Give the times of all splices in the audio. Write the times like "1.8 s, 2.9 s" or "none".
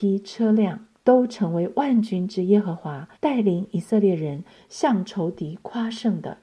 1.0 s, 3.2 s